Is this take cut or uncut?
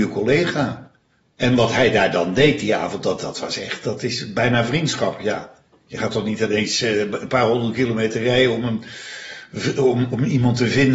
cut